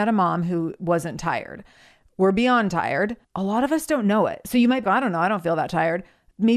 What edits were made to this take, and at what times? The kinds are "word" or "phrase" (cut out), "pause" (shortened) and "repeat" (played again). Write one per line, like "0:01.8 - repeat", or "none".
0:03.2 - pause
0:04.8 - word